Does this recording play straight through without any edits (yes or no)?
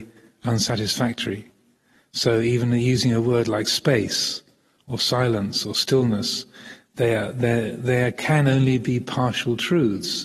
yes